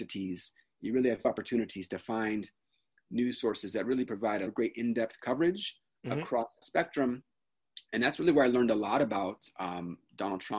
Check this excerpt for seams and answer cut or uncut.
cut